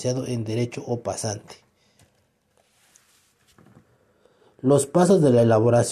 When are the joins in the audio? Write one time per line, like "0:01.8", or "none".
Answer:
none